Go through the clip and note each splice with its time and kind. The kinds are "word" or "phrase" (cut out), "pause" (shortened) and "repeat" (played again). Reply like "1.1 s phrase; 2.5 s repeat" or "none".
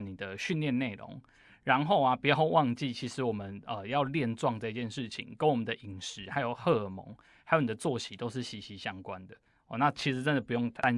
none